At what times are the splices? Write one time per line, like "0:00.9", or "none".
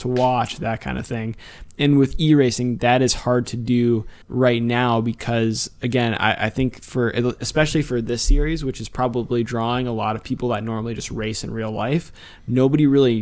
0:04.2